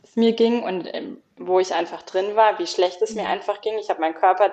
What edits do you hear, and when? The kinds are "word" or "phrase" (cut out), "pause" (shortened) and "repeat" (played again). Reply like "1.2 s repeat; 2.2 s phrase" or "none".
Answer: none